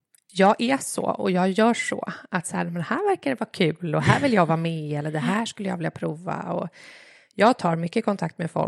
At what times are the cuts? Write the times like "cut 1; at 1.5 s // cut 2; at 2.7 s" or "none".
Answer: none

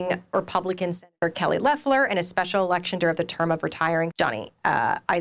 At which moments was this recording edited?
cut 1; at 3.0 s // cut 2; at 4.1 s

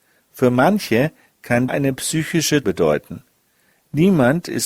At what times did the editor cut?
cut 1; at 1.7 s // cut 2; at 2.6 s

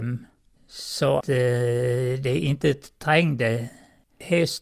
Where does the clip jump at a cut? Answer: cut 1; at 1.2 s

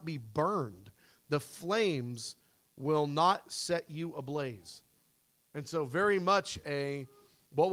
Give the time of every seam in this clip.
none

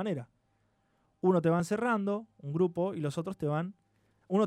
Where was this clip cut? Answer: none

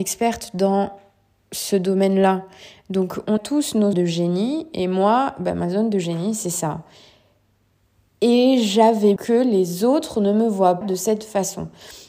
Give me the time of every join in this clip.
cut 1; at 3.4 s // cut 2; at 3.9 s // cut 3; at 9.2 s // cut 4; at 10.8 s

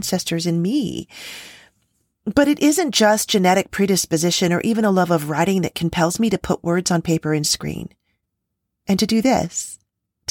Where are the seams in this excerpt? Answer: none

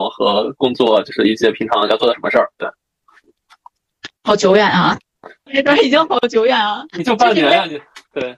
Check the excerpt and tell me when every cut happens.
cut 1; at 4.2 s // cut 2; at 5.5 s

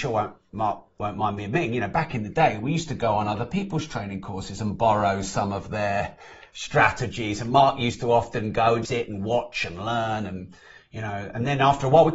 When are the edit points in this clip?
cut 1; at 8.8 s

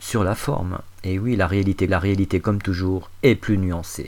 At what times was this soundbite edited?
cut 1; at 1.9 s

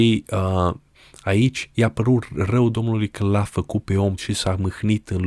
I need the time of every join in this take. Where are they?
cut 1; at 4.2 s

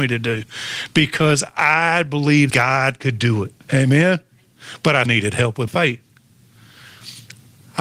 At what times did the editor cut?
cut 1; at 2.5 s // cut 2; at 3.6 s // cut 3; at 5.0 s // cut 4; at 5.7 s

